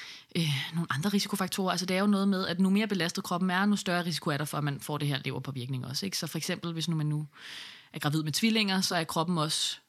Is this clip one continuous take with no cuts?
yes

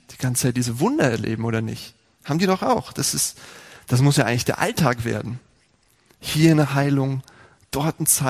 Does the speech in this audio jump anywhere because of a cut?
no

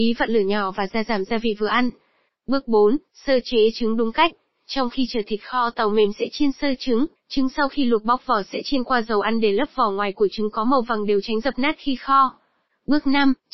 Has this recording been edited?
yes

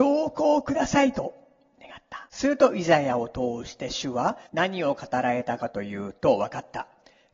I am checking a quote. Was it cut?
yes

